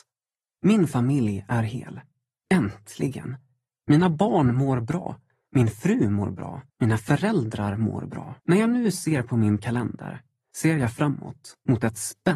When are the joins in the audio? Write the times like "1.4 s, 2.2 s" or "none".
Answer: 6.7 s, 8.4 s